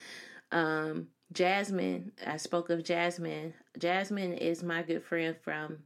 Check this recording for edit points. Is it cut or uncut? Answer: cut